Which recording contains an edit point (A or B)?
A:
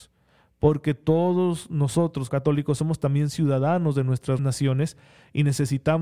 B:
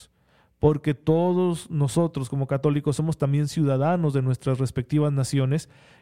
A